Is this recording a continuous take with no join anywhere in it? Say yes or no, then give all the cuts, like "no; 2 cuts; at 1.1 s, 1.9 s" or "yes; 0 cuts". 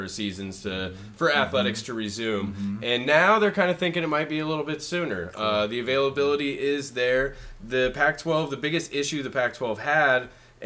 yes; 0 cuts